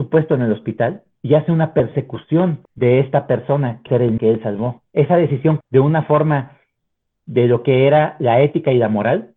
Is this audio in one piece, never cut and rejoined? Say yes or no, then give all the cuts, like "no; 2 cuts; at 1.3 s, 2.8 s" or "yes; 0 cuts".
no; 7 cuts; at 1.1 s, 2.6 s, 3.9 s, 4.2 s, 4.9 s, 5.6 s, 7.1 s